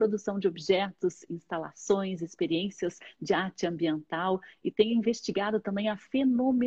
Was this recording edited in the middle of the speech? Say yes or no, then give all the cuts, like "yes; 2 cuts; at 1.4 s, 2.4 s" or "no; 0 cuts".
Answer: no; 0 cuts